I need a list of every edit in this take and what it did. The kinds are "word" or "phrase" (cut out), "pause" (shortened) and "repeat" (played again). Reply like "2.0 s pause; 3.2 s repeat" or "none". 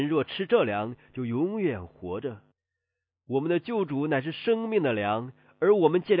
2.5 s pause